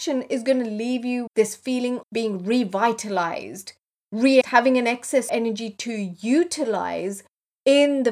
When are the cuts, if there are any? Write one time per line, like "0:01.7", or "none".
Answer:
0:01.3
0:02.0
0:04.4
0:05.3

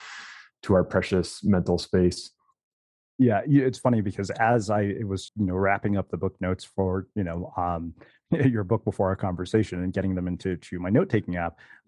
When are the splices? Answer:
0:05.3

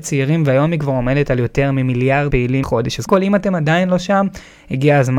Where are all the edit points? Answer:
0:02.3
0:02.6
0:03.1

